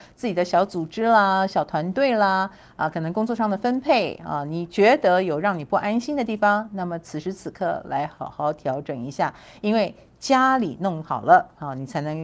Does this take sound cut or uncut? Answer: uncut